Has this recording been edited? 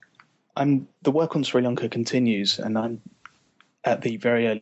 no; 0 cuts

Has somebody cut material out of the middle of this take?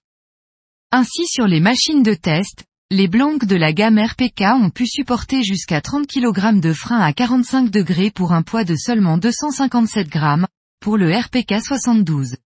no; 0 cuts

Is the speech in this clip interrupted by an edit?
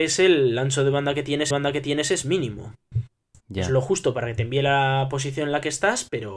yes; 1 cut; at 1.5 s

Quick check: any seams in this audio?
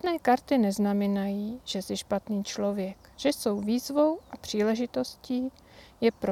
yes; 1 cut; at 3.1 s

